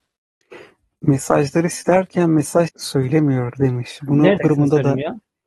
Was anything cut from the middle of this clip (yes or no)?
yes